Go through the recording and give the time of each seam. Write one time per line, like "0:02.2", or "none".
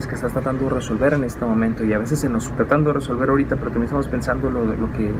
0:02.5